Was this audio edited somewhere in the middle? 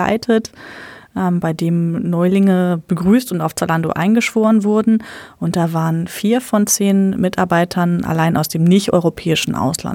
no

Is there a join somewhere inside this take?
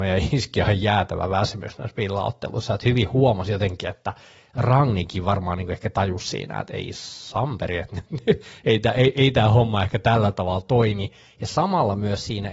no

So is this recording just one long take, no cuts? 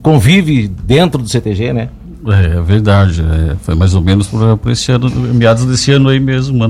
yes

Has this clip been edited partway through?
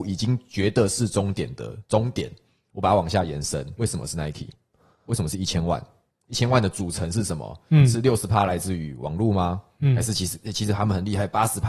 yes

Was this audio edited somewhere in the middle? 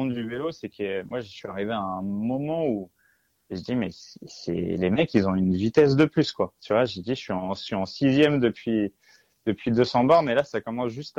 no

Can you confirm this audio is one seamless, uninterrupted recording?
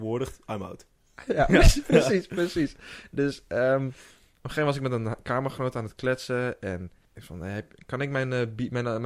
yes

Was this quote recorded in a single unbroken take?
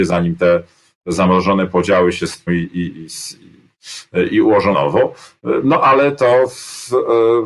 no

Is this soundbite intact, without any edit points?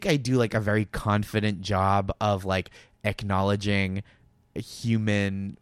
yes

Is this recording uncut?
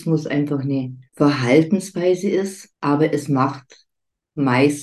no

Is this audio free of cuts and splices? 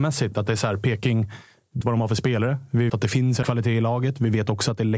no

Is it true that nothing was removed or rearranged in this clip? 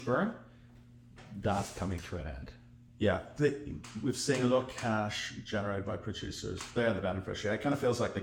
yes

